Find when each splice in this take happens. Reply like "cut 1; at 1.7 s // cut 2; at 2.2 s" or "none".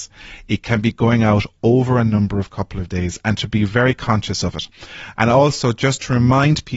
none

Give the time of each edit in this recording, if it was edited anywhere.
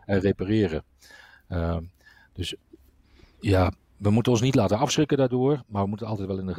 cut 1; at 3.9 s

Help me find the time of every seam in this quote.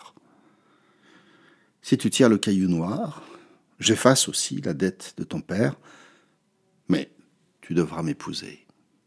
none

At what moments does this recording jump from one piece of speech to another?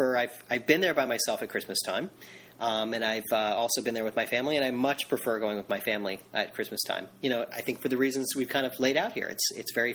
none

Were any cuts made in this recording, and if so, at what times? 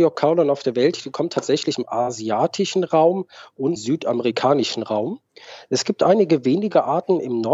cut 1; at 1.7 s // cut 2; at 3.8 s

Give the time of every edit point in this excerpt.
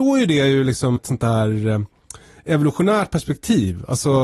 cut 1; at 1.0 s

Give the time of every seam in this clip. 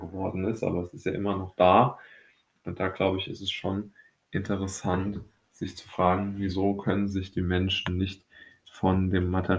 none

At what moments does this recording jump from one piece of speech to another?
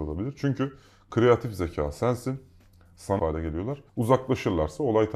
cut 1; at 3.2 s // cut 2; at 3.9 s

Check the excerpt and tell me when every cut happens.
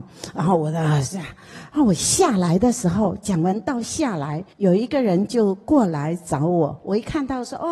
cut 1; at 4.5 s

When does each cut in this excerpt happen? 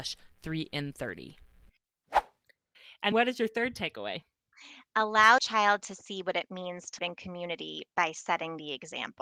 cut 1; at 3.1 s // cut 2; at 5.4 s // cut 3; at 7.0 s

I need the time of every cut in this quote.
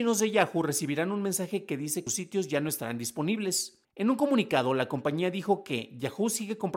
cut 1; at 2.1 s

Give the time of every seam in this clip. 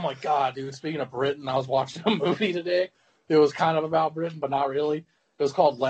none

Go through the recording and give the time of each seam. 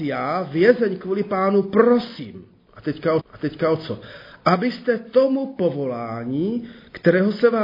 cut 1; at 3.2 s

